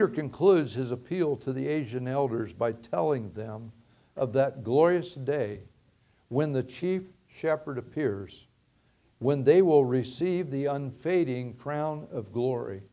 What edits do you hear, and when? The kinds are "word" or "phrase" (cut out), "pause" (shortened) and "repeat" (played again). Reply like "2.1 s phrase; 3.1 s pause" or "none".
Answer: none